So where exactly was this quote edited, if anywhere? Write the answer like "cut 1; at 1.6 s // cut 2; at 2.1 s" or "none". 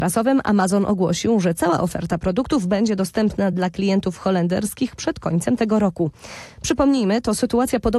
none